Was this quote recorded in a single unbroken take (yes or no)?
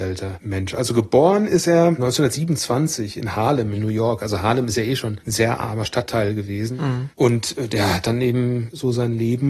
yes